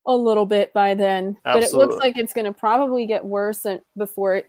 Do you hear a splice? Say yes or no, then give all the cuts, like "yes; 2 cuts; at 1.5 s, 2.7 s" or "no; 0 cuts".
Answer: yes; 1 cut; at 1.4 s